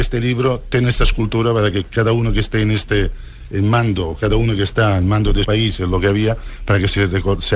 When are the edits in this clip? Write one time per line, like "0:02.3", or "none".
0:05.4